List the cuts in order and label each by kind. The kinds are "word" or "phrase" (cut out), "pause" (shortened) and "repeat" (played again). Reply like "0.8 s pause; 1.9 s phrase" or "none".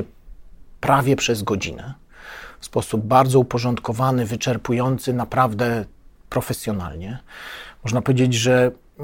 none